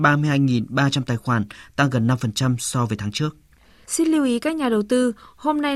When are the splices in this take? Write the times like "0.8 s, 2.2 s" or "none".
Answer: none